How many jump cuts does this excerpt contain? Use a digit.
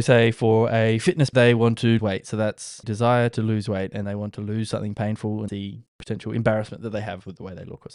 6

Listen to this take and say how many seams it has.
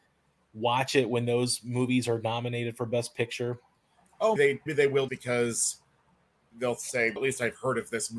4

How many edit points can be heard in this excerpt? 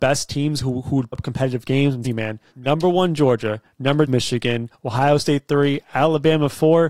4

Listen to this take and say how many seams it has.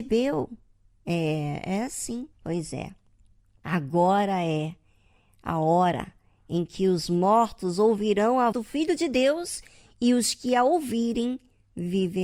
2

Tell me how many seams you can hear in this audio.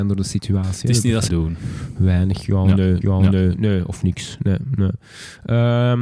2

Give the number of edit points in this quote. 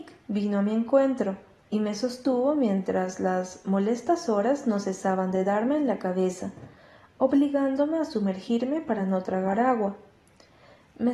0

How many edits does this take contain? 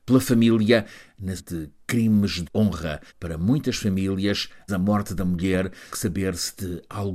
5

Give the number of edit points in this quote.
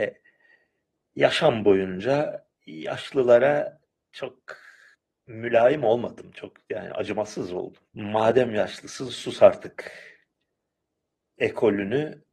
2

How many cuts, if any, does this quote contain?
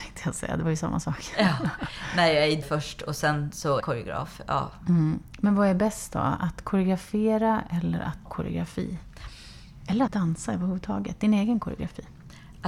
4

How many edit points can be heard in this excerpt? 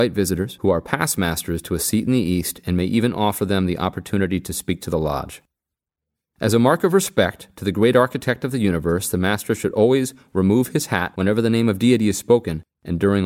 0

